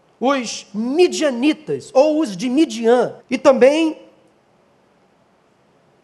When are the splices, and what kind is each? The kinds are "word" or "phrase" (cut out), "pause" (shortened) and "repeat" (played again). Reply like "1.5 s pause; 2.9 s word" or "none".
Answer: 3.2 s pause